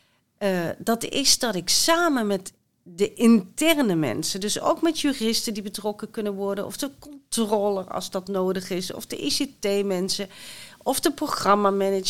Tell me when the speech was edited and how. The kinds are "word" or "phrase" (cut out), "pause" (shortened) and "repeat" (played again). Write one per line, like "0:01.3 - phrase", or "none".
none